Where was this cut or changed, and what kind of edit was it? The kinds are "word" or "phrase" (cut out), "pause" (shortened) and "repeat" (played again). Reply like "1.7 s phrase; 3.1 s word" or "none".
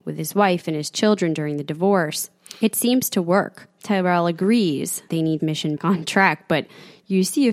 5.1 s word; 5.4 s phrase; 5.8 s word